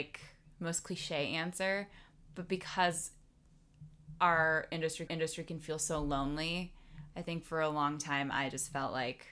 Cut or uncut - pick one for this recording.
cut